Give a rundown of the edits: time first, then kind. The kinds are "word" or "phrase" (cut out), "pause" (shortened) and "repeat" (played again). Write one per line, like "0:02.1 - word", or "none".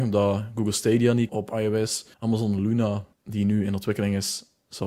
0:01.3 - word
0:02.1 - pause
0:03.1 - pause

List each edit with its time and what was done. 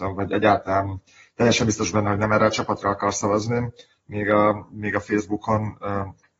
none

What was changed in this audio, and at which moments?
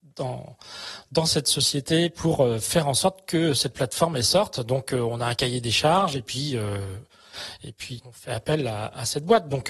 0:08.0 - word

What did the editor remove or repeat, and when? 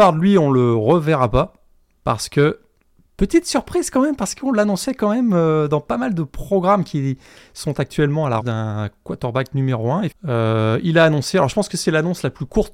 0:08.4 - word
0:10.1 - word

